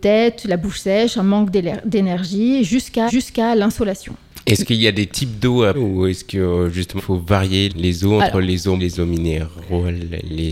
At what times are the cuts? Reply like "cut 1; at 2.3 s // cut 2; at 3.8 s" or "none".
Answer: cut 1; at 3.1 s // cut 2; at 5.7 s // cut 3; at 7.0 s // cut 4; at 7.7 s // cut 5; at 8.8 s